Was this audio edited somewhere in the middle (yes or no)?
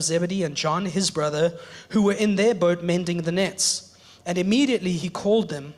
no